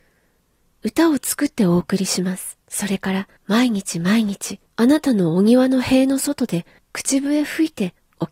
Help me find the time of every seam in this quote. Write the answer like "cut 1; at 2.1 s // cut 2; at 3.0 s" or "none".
cut 1; at 2.6 s // cut 2; at 3.4 s // cut 3; at 4.7 s // cut 4; at 6.8 s